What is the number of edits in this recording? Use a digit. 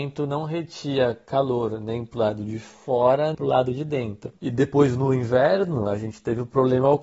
1